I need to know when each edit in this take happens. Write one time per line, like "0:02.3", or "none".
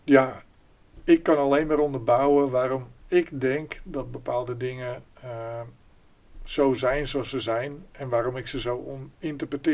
none

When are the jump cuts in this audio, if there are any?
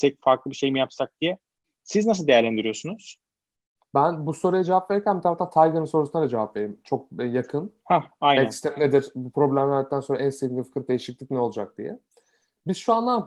none

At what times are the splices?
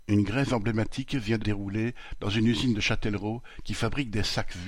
0:01.4

